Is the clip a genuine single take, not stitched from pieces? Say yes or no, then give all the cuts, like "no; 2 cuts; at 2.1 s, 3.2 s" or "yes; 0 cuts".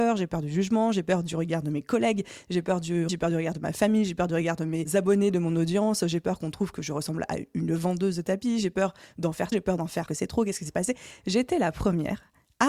no; 3 cuts; at 3.1 s, 9.5 s, 10.1 s